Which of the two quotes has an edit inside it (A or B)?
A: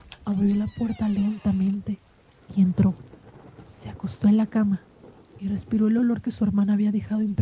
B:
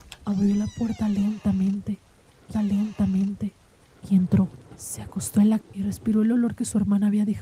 B